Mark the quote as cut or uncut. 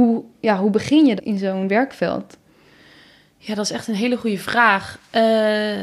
cut